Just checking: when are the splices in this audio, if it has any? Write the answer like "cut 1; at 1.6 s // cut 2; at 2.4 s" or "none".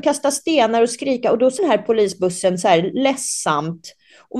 cut 1; at 1.6 s